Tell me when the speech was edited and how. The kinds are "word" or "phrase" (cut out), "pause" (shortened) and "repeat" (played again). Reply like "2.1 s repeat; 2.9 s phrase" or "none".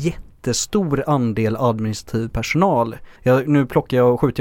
3.2 s pause